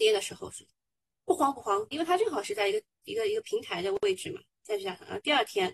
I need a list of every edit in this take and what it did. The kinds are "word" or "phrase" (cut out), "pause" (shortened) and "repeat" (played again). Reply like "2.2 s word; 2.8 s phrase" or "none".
1.9 s phrase